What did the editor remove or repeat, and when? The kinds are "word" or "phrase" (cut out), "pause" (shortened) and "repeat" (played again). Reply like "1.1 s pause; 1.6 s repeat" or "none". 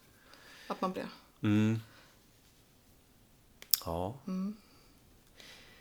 0.9 s word